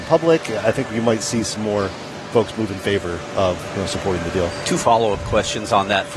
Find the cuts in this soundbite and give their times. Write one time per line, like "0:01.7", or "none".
none